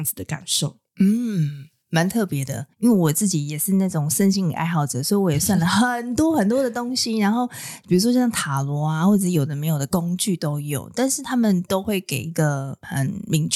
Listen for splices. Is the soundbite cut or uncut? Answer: cut